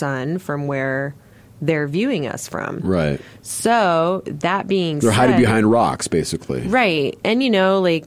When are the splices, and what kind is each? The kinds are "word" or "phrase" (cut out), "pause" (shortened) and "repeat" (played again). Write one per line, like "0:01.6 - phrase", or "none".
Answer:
none